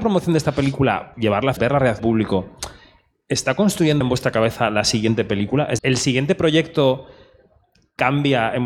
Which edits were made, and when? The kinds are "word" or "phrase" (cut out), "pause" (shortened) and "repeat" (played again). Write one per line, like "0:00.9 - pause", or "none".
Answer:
0:01.1 - word
0:01.6 - word
0:02.0 - word
0:04.0 - word
0:05.8 - word